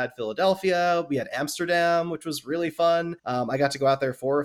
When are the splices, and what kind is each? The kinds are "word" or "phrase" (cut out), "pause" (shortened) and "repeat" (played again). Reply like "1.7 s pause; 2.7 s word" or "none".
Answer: 3.2 s pause